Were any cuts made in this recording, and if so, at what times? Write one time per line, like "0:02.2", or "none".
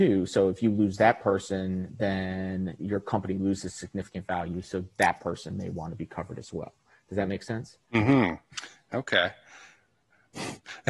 none